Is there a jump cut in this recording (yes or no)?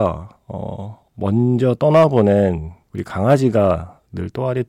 yes